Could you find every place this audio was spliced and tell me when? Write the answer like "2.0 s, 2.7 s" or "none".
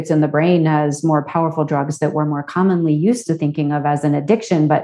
none